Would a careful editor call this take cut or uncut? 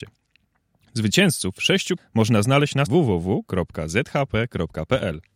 cut